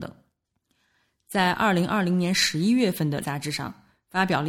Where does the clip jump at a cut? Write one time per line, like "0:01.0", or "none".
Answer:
0:03.2